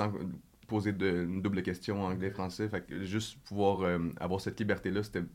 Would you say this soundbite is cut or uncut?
uncut